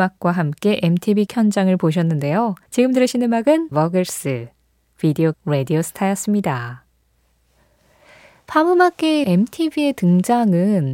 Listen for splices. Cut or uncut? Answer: cut